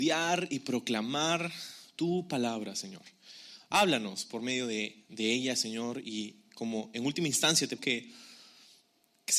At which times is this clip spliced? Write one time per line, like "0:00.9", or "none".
0:05.1
0:07.8